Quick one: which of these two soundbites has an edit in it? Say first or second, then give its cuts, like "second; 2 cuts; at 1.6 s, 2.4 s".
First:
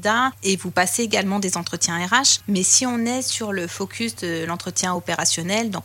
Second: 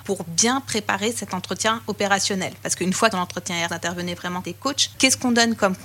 second; 3 cuts; at 3.1 s, 3.7 s, 4.4 s